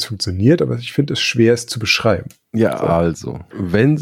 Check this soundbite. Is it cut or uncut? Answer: uncut